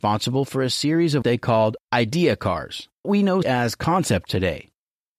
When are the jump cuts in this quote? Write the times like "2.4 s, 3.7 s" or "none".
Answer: 1.2 s, 1.8 s, 3.0 s, 3.4 s, 4.3 s